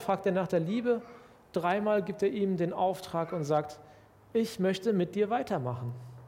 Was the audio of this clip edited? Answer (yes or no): no